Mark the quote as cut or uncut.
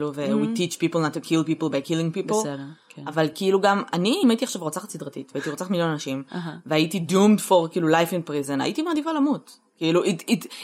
uncut